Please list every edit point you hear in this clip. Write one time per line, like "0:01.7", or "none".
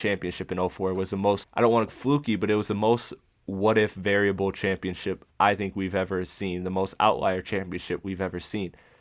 0:01.4
0:01.9
0:05.3